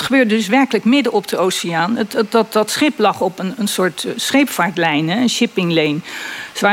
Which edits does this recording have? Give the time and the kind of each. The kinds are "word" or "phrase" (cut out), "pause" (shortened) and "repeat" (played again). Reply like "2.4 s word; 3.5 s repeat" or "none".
none

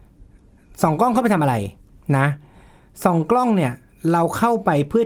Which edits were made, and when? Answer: none

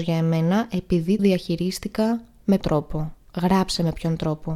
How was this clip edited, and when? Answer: 1.2 s word; 2.6 s word

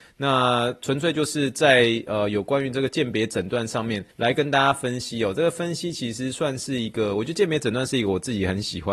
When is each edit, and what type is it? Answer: 4.1 s pause

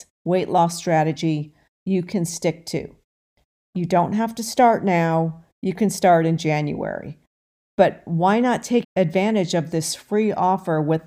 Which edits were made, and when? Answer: 8.8 s word

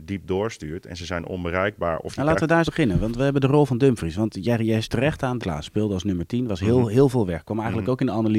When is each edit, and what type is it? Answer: 2.7 s word; 4.8 s word; 5.4 s word

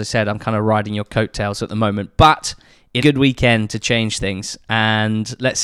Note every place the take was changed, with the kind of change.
3.0 s phrase

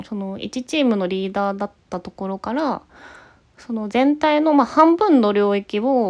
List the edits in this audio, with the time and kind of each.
none

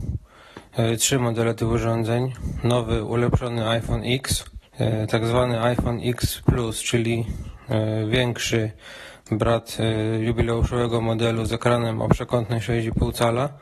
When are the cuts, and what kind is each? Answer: 4.7 s pause

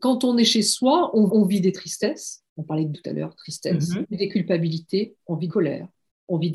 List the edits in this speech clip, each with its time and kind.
1.3 s repeat; 2.5 s pause; 2.9 s word; 4.0 s word; 5.5 s word

